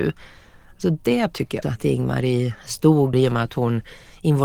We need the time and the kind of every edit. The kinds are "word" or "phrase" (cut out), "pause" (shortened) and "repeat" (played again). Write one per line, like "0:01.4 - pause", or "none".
0:01.3 - word
0:01.6 - word
0:03.1 - word